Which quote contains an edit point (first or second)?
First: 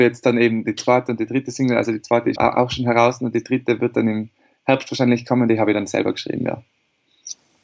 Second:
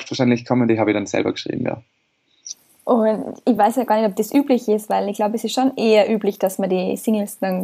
first